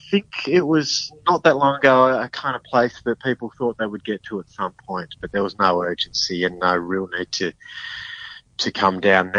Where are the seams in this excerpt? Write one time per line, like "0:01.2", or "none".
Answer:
none